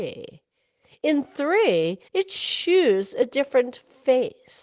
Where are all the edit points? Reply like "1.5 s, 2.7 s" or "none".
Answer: 2.1 s